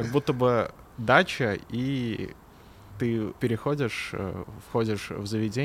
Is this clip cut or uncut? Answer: cut